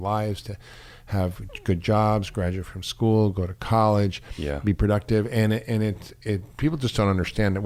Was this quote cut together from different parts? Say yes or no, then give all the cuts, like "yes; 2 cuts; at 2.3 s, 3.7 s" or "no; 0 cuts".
no; 0 cuts